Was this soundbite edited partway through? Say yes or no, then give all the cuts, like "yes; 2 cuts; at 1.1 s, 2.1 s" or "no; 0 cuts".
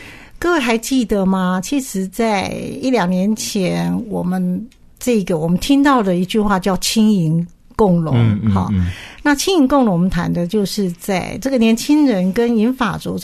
no; 0 cuts